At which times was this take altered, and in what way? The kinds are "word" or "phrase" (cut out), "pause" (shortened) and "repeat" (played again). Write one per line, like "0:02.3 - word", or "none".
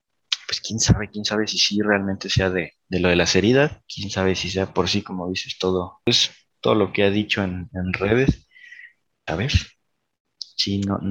0:03.8 - pause
0:09.3 - phrase